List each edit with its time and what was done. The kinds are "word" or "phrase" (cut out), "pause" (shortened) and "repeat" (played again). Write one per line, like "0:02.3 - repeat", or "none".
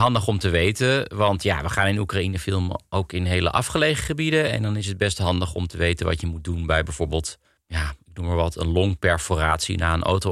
0:07.4 - pause